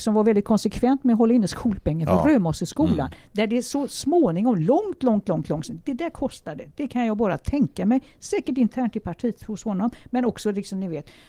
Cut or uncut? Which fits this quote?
uncut